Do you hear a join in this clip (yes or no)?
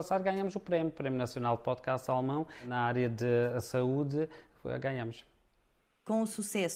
no